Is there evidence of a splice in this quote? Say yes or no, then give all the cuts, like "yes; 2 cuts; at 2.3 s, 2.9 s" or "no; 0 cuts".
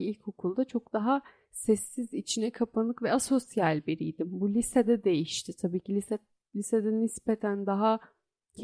no; 0 cuts